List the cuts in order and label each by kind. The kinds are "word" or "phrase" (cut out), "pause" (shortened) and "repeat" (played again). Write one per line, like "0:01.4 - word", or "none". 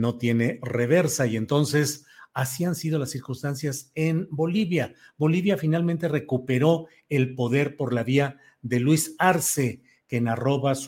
none